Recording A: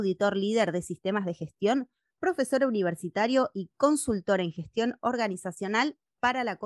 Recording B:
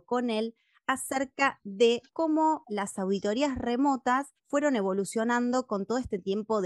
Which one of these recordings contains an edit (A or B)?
B